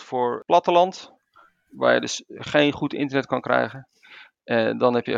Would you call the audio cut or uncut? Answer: uncut